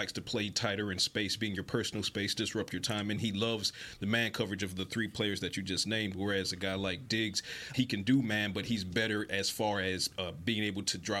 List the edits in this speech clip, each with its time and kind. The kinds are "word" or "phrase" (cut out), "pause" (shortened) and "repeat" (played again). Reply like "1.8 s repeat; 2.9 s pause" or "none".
7.7 s word